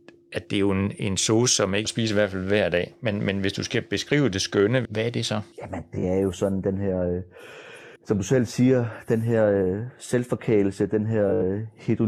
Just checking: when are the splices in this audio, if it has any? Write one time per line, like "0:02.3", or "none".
0:01.8
0:04.8
0:05.5
0:08.0